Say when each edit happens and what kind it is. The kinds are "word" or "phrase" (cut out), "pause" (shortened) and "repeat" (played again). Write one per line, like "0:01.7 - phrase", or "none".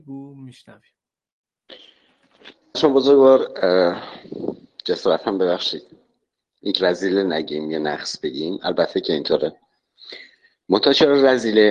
0:02.7 - word
0:06.8 - word